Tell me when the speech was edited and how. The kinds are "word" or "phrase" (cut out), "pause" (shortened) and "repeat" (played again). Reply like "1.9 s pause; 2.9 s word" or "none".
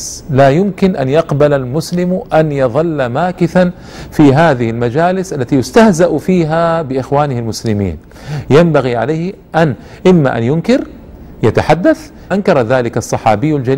12.3 s word